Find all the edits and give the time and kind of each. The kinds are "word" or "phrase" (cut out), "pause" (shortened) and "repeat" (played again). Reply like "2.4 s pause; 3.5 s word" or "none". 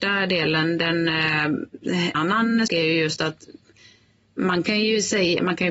2.1 s word; 2.7 s word

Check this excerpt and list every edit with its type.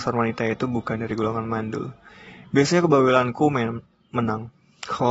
none

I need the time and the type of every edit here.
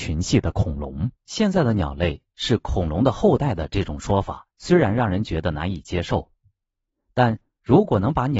1.2 s pause; 4.5 s pause

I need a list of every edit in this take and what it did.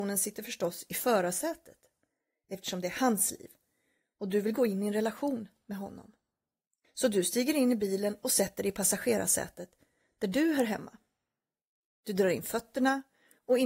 none

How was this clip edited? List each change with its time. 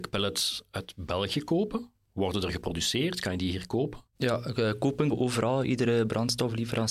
4.1 s pause; 5.1 s phrase

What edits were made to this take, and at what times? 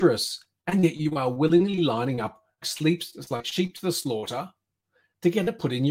2.6 s word

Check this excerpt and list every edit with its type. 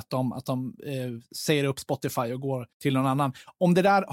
2.7 s pause

